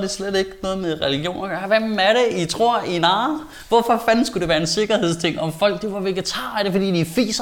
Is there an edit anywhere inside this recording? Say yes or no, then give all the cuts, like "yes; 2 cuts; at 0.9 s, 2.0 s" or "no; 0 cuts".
no; 0 cuts